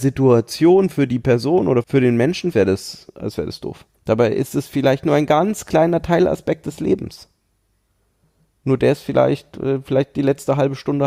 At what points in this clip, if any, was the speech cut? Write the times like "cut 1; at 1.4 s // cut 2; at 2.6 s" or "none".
cut 1; at 1.8 s // cut 2; at 2.5 s // cut 3; at 3.9 s